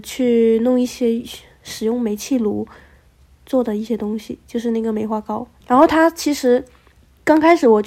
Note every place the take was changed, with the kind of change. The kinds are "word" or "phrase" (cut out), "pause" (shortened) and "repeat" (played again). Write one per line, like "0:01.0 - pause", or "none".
0:05.6 - word